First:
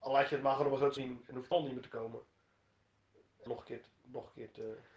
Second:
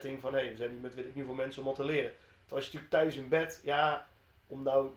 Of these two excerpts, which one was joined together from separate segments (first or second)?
first